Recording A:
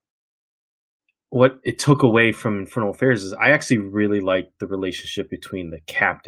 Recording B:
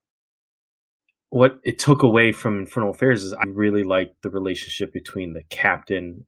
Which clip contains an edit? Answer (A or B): B